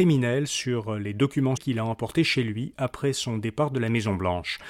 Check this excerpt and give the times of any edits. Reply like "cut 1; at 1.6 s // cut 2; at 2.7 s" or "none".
cut 1; at 1.6 s